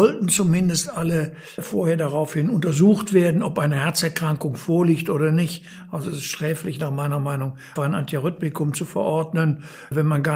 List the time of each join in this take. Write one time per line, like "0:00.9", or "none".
0:07.8

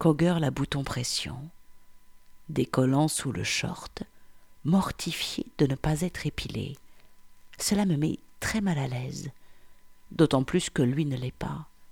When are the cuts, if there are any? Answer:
none

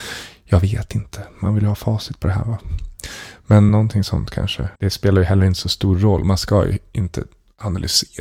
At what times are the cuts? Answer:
0:03.7
0:04.7

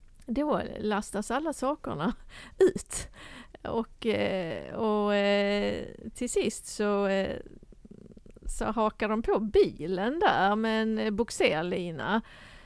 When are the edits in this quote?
none

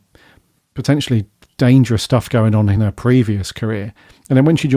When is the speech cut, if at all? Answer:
none

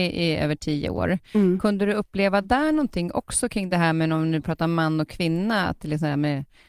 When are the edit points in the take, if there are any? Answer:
none

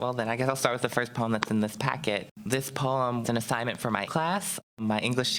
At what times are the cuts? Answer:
0:03.2
0:04.1

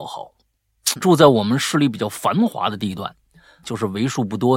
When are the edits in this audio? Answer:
0:01.0
0:03.6

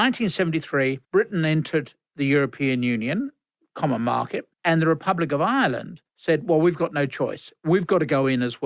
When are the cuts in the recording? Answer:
0:01.0
0:04.5
0:06.1

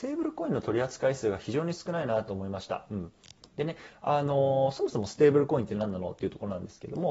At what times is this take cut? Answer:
0:03.4

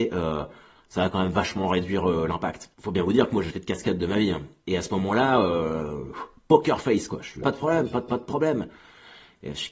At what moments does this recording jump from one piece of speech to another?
0:02.7
0:03.5
0:07.4
0:08.1

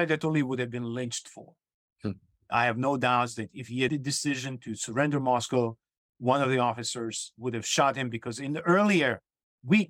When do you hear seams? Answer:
0:03.9

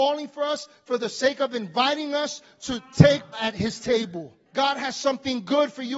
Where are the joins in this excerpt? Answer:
0:03.3
0:04.5

